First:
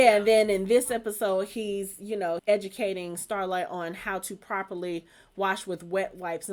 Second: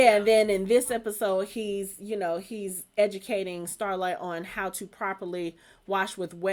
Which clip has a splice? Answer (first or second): first